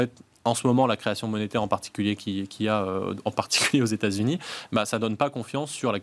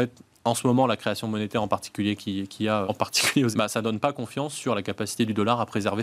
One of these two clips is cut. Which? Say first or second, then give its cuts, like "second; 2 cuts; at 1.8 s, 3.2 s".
second; 2 cuts; at 2.8 s, 3.5 s